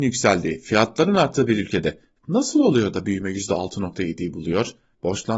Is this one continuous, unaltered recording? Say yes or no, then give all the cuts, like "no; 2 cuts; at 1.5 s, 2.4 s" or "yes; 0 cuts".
yes; 0 cuts